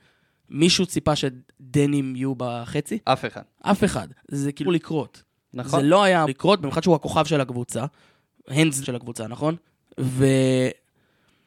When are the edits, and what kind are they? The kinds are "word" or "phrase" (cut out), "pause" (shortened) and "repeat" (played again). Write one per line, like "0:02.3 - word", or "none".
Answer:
0:03.0 - pause
0:04.6 - phrase
0:06.3 - word
0:08.8 - phrase
0:09.7 - pause